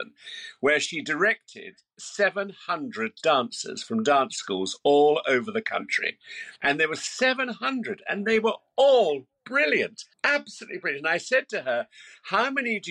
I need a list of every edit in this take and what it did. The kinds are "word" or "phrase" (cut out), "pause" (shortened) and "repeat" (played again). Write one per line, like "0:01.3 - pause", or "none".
0:06.6 - pause